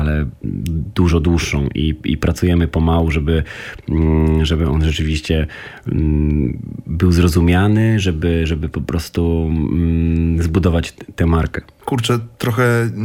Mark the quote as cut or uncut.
uncut